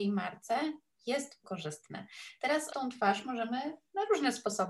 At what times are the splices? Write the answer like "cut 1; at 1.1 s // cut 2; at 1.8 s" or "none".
cut 1; at 1.4 s // cut 2; at 2.7 s